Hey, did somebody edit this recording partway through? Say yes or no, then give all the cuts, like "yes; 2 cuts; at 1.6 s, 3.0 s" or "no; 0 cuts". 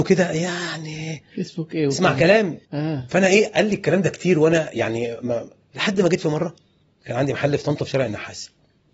yes; 2 cuts; at 2.6 s, 6.8 s